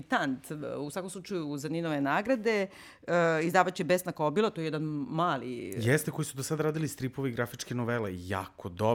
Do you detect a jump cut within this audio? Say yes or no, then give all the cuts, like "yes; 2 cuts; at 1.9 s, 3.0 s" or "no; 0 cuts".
no; 0 cuts